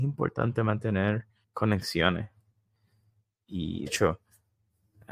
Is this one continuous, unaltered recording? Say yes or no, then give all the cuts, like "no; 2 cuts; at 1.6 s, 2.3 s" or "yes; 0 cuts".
no; 2 cuts; at 1.4 s, 3.9 s